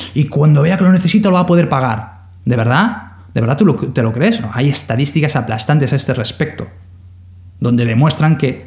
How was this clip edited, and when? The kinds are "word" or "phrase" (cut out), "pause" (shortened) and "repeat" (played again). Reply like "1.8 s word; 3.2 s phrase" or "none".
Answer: none